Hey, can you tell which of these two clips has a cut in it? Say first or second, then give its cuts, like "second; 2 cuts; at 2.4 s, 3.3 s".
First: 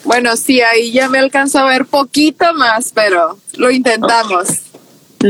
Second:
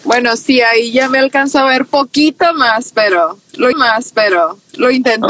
second; 1 cut; at 3.7 s